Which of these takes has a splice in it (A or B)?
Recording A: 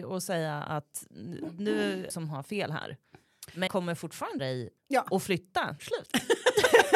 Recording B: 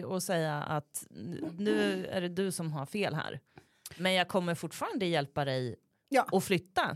A